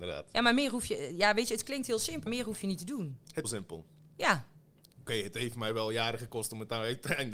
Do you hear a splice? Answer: yes; 2 cuts; at 2.3 s, 3.4 s

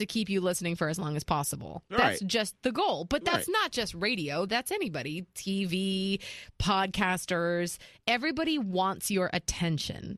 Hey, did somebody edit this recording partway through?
no; 0 cuts

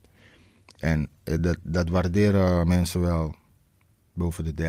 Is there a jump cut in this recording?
no; 0 cuts

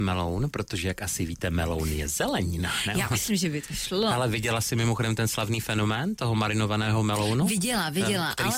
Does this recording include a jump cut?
no; 0 cuts

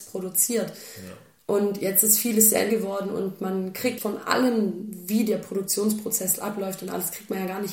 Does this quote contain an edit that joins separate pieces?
yes; 2 cuts; at 2.7 s, 4.0 s

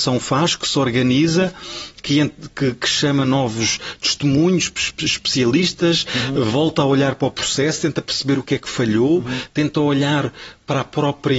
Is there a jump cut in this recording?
no; 0 cuts

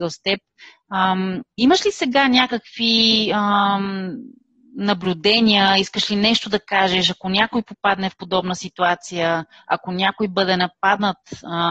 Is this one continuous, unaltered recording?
yes; 0 cuts

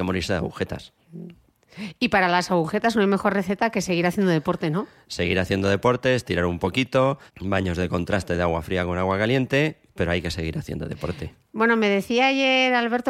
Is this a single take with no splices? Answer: no; 1 cut; at 7.3 s

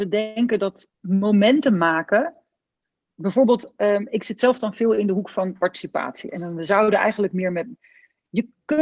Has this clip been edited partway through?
yes; 1 cut; at 0.9 s

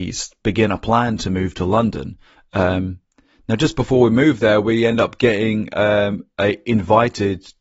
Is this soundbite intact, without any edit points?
yes; 0 cuts

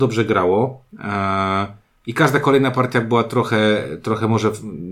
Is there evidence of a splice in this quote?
no; 0 cuts

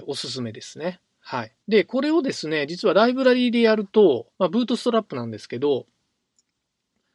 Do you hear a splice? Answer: yes; 2 cuts; at 1.6 s, 4.3 s

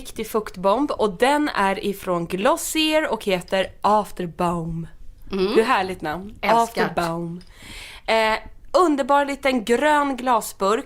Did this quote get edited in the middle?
no; 0 cuts

